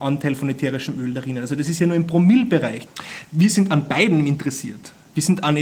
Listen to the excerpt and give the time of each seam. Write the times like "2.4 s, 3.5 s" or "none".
none